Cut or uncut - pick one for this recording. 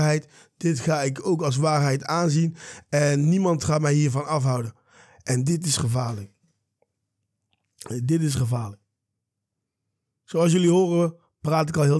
uncut